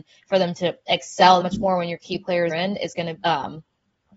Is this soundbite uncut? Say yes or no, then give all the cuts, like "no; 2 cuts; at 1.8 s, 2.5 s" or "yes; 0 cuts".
no; 3 cuts; at 1.4 s, 2.5 s, 3.2 s